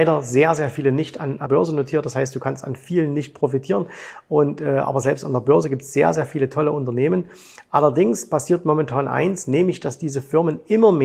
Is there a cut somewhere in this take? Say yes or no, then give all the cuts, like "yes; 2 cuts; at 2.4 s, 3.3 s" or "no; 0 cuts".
yes; 1 cut; at 1.5 s